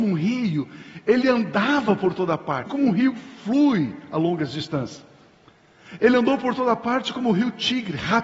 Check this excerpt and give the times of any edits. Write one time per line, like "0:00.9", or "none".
0:02.7